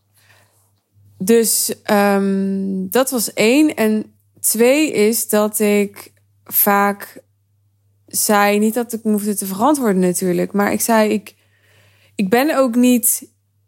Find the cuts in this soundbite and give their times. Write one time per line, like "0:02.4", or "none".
none